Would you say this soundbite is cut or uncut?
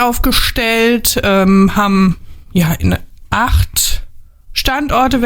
uncut